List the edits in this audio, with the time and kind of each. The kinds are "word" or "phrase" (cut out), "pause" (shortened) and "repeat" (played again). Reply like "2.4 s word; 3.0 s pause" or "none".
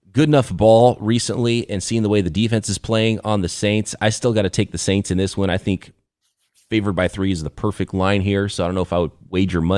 none